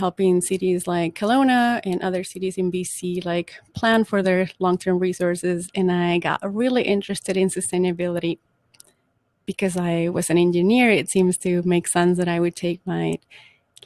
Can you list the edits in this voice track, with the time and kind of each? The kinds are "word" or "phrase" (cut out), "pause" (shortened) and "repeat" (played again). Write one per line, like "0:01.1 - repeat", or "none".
none